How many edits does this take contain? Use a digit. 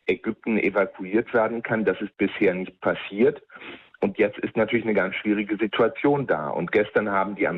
0